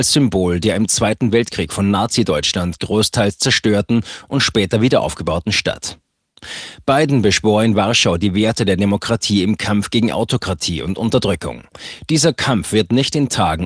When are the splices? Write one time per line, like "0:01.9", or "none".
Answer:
none